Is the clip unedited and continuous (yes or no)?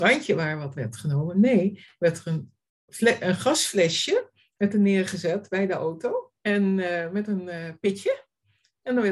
no